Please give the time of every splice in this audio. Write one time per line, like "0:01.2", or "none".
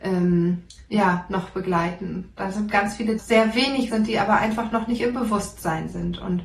0:03.2
0:03.9